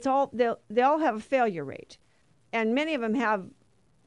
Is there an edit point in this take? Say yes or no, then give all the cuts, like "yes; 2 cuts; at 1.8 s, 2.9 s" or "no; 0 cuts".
no; 0 cuts